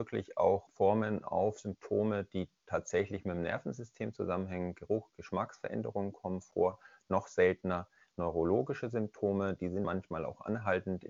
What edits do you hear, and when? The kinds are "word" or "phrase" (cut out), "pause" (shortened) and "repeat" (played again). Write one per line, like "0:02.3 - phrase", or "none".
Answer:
0:09.8 - word